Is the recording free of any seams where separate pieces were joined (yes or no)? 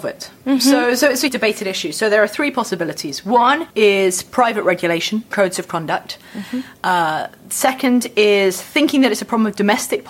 no